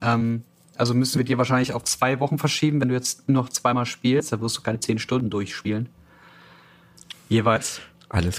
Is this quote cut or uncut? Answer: uncut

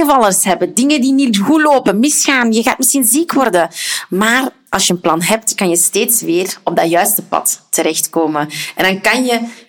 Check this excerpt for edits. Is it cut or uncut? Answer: uncut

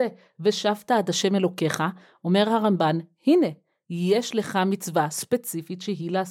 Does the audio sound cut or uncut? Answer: uncut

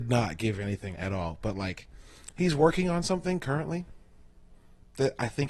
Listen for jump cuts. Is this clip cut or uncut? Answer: cut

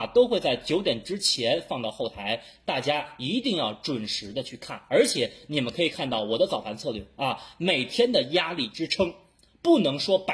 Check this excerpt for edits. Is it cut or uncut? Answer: uncut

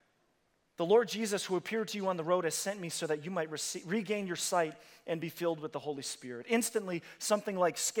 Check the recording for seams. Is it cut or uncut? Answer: uncut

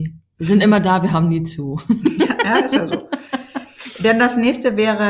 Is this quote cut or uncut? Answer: uncut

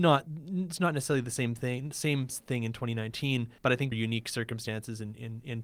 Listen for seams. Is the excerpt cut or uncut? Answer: cut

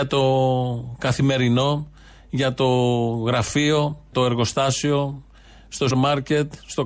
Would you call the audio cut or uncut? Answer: cut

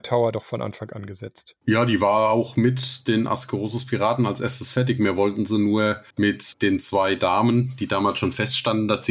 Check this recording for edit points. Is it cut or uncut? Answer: cut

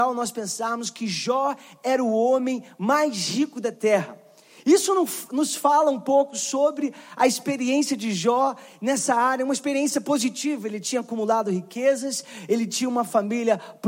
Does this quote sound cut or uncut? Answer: uncut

